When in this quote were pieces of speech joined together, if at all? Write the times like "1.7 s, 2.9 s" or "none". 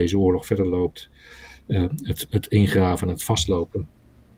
none